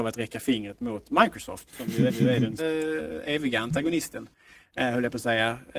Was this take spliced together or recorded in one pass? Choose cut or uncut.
cut